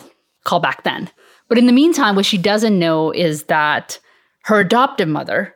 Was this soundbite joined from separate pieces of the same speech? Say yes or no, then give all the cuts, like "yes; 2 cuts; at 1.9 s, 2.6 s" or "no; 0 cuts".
no; 0 cuts